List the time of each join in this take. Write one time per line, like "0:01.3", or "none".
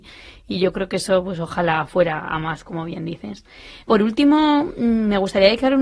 0:03.8